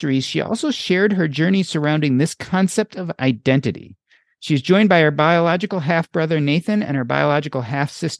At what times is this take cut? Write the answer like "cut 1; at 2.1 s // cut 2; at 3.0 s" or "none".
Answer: none